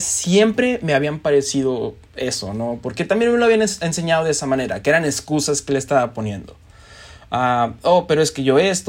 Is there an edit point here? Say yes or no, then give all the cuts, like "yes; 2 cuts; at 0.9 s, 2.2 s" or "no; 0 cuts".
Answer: no; 0 cuts